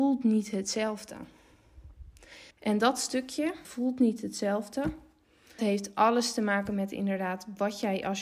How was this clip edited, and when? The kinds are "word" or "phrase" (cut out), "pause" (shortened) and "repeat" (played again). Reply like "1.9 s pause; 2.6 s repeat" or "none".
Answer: 2.5 s pause; 3.6 s word; 5.6 s word

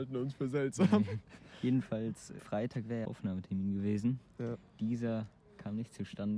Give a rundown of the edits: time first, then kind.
2.4 s word; 3.0 s phrase

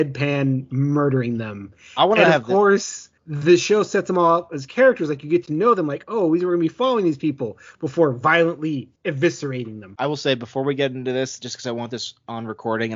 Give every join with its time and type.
3.2 s pause; 9.0 s pause

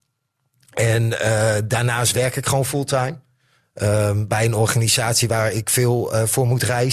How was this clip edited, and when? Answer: none

